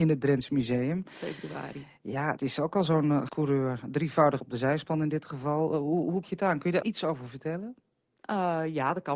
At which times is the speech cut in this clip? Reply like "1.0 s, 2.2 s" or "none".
2.4 s, 3.3 s, 4.4 s, 6.2 s, 6.8 s

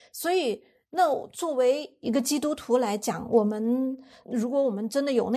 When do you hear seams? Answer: none

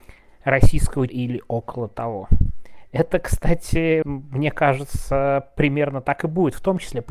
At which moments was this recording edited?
1.1 s, 4.0 s

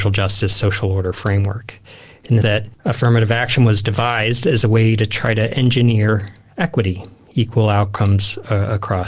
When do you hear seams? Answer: 2.4 s

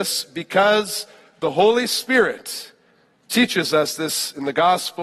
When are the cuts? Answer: none

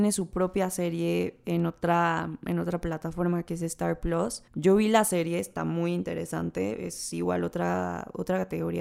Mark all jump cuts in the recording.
4.5 s

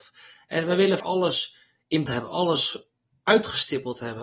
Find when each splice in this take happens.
1.0 s, 2.1 s

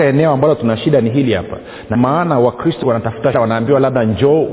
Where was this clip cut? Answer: 1.9 s, 2.8 s, 3.3 s

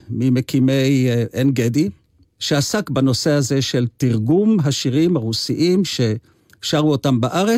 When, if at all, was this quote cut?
none

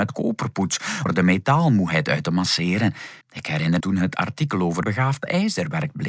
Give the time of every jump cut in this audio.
1.1 s, 3.2 s, 3.8 s, 4.8 s

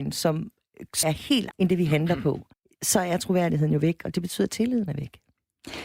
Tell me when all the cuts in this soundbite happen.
1.0 s, 1.5 s, 2.5 s

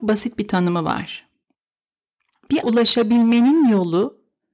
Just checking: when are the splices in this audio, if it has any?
2.6 s

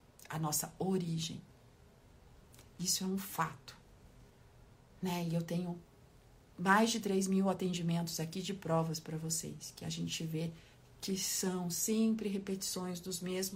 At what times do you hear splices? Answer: none

